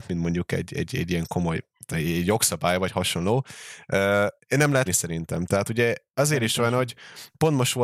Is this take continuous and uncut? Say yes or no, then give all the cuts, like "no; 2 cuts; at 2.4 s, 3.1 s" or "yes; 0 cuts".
no; 3 cuts; at 1.9 s, 4.4 s, 4.9 s